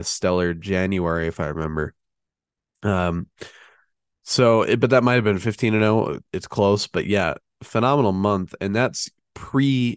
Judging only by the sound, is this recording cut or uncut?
uncut